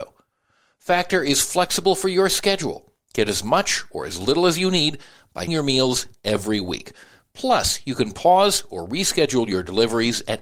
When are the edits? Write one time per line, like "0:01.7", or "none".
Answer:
0:05.5